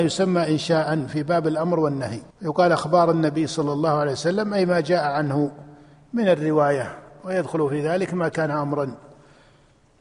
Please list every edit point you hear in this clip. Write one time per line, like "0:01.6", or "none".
0:02.3